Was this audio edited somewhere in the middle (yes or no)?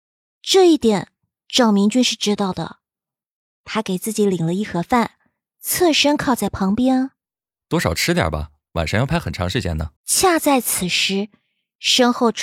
yes